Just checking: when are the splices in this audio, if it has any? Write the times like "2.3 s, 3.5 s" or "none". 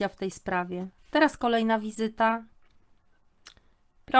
1.0 s